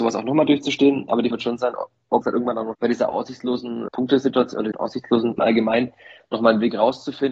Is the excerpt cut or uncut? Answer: cut